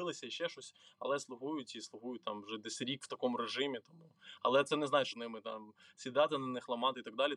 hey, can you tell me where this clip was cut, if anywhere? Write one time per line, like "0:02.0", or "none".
0:05.1